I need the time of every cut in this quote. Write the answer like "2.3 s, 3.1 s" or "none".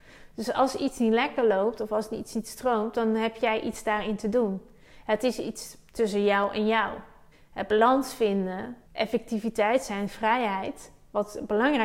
7.3 s, 8.8 s